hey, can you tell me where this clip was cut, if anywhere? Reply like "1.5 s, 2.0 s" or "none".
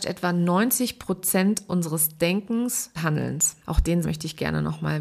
2.9 s, 3.6 s, 4.0 s